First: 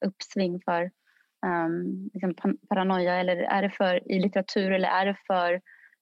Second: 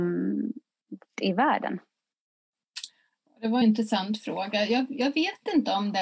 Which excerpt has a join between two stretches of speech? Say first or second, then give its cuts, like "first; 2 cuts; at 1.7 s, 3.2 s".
second; 2 cuts; at 1.2 s, 3.6 s